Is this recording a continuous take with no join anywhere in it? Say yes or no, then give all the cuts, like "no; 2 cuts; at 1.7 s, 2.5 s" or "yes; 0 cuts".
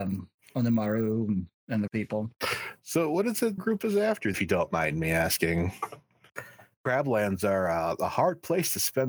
no; 4 cuts; at 1.6 s, 1.9 s, 3.6 s, 4.3 s